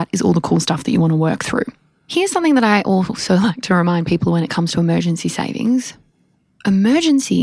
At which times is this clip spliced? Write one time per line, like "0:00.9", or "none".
none